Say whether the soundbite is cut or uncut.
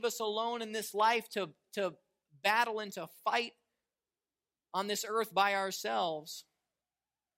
uncut